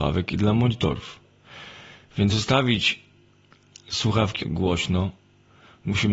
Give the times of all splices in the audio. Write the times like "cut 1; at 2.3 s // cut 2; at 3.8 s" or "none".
cut 1; at 2.3 s // cut 2; at 4.4 s